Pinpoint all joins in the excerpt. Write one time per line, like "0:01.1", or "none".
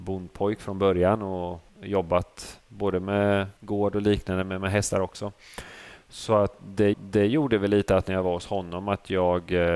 0:01.7
0:03.6
0:06.9

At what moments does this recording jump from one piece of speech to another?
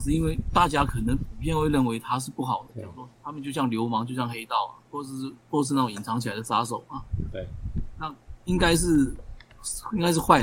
0:02.7
0:03.1
0:04.9

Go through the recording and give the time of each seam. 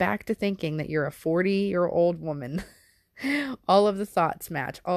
none

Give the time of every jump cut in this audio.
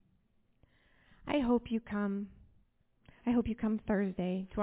none

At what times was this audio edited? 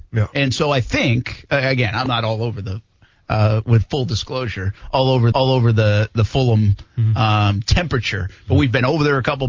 0:05.3

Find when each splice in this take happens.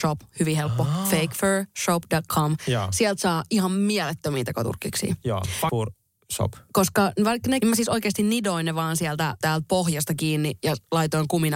0:05.7
0:07.6
0:09.4

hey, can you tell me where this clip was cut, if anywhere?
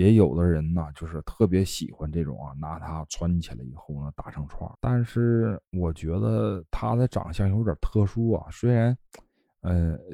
0:04.7

